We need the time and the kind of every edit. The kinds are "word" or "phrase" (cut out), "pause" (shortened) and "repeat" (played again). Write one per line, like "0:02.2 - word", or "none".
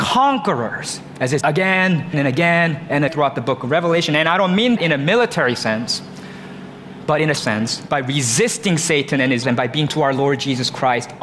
0:01.4 - word
0:02.1 - word
0:03.1 - word
0:04.8 - word
0:07.4 - word
0:09.4 - word
0:09.9 - word